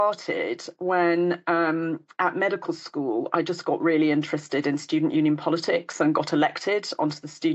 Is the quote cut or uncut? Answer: uncut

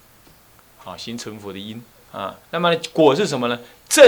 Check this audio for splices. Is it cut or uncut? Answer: cut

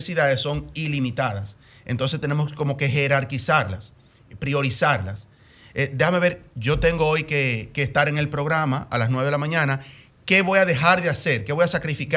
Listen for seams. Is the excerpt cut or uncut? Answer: uncut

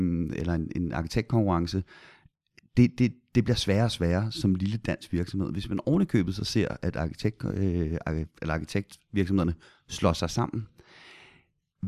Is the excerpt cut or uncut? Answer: uncut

